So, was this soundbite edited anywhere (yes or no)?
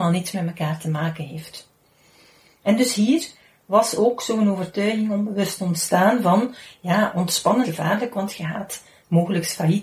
yes